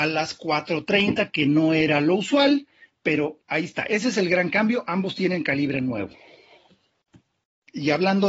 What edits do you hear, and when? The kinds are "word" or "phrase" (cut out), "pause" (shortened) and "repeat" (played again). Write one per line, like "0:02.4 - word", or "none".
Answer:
none